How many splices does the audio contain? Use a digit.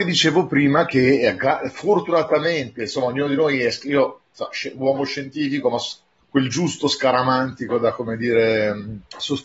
1